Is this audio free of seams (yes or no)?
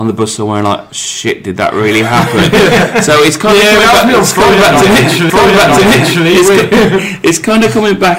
no